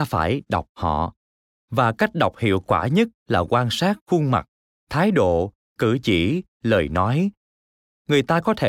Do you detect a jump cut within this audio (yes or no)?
no